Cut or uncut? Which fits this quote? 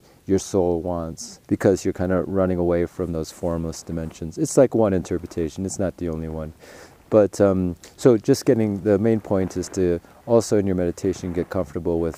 cut